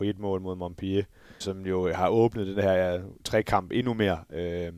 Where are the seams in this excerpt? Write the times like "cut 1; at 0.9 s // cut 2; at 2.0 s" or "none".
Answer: cut 1; at 1.4 s // cut 2; at 3.2 s